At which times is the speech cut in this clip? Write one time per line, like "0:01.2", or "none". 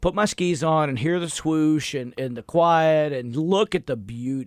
none